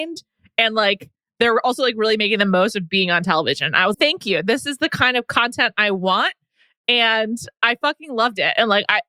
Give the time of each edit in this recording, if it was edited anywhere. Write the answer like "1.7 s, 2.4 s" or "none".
3.9 s